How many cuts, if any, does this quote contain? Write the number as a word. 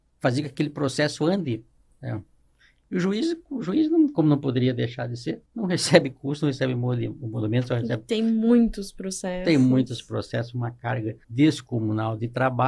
two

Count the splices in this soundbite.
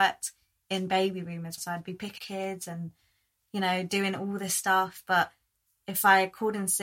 two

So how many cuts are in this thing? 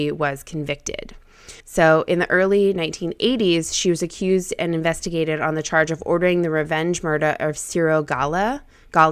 one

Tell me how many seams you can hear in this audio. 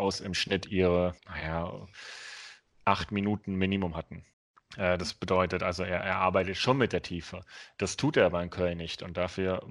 two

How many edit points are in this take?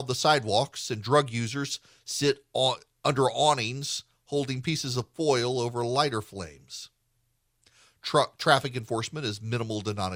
zero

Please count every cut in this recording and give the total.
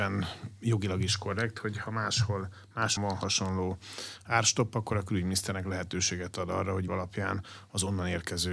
two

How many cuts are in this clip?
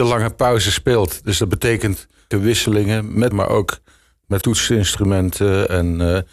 three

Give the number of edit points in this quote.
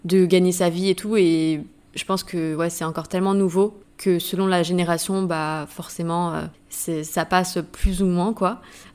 zero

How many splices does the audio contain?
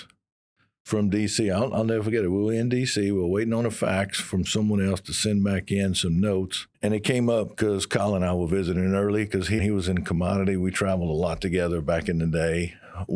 two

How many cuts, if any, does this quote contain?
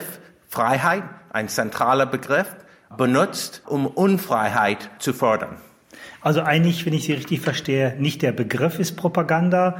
zero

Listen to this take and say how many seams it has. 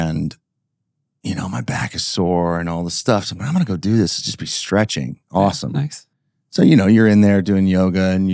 zero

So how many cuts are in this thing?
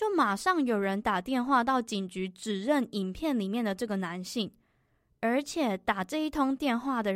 zero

